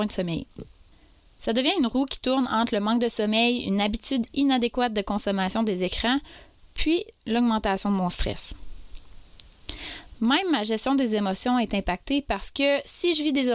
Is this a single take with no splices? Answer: yes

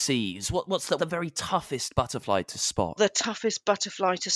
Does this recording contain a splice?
yes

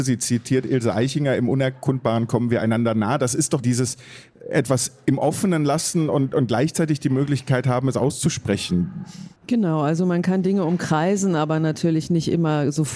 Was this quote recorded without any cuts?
no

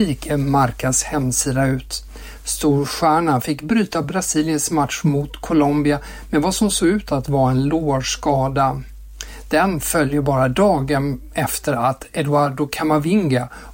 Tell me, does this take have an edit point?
no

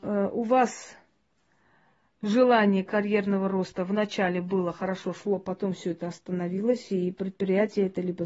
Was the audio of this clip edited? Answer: no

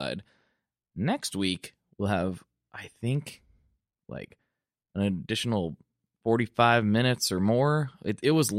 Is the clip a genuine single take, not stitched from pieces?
yes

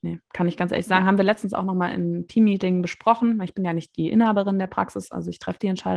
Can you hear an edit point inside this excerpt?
no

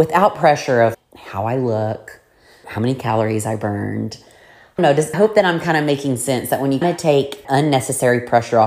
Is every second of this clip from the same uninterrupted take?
no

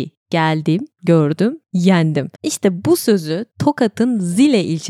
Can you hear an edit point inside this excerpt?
yes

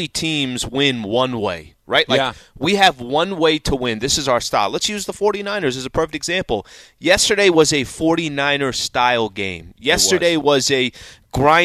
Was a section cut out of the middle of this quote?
no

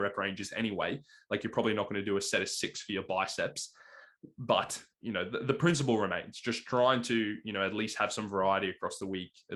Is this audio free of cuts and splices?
yes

